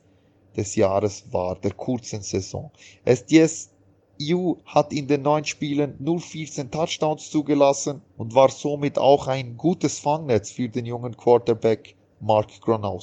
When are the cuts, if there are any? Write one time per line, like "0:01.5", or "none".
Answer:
0:08.1